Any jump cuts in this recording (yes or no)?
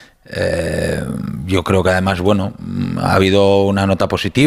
no